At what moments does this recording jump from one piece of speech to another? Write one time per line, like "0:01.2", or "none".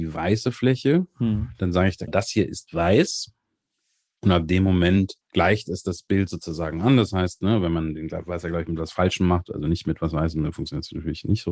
0:02.1
0:05.2